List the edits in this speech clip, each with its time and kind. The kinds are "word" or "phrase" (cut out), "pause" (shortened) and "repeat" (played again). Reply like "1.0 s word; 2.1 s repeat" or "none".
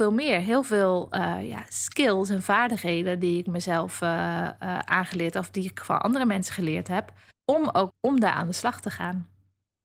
7.3 s pause; 7.9 s phrase